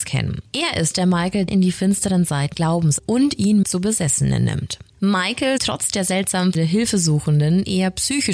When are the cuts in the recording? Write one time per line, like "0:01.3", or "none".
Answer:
0:00.9
0:01.5
0:02.5
0:03.0
0:03.6
0:05.6
0:06.5